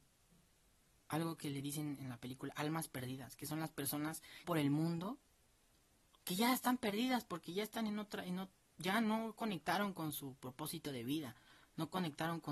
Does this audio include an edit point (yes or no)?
yes